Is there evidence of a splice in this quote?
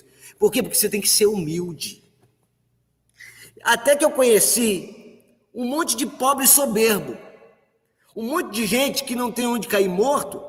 no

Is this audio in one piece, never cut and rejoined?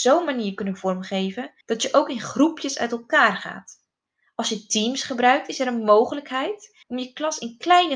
no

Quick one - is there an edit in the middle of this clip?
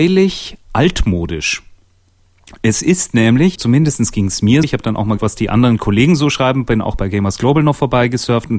yes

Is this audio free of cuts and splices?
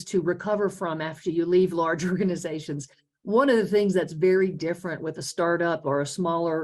yes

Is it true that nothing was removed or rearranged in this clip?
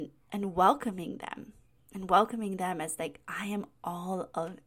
yes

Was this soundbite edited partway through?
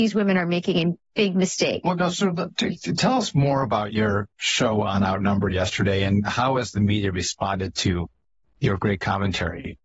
no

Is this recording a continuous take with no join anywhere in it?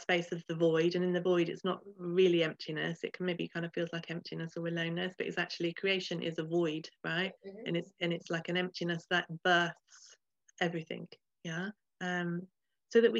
no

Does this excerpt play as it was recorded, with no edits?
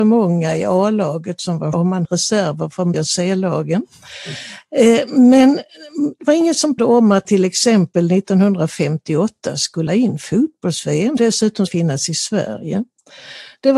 no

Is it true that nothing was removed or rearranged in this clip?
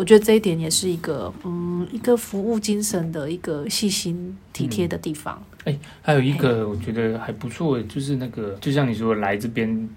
yes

